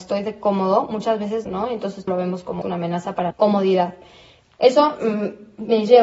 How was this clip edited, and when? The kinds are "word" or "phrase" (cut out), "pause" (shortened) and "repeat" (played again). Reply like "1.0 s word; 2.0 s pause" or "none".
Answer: 1.5 s phrase; 2.1 s word; 2.6 s phrase; 3.3 s word